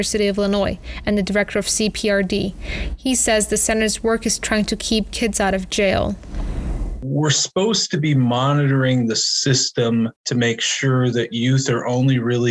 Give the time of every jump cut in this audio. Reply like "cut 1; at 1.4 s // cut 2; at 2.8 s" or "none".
cut 1; at 10.2 s